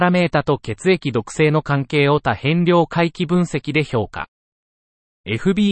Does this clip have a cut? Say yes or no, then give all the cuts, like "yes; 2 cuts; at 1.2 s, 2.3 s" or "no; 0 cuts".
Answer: no; 0 cuts